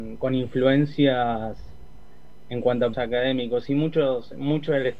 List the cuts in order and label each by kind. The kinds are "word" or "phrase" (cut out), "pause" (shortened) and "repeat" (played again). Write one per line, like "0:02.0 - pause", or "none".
0:02.5 - word
0:02.9 - word